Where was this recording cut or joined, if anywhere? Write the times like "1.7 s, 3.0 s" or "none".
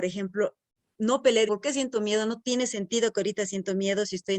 0.9 s, 1.5 s